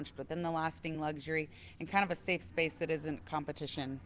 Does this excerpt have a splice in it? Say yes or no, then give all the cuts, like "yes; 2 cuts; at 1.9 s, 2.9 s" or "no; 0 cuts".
no; 0 cuts